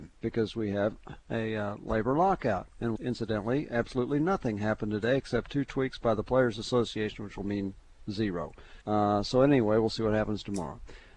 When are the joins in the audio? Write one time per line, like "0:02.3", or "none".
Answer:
0:03.0
0:08.8